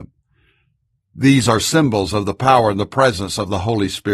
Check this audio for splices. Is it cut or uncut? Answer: uncut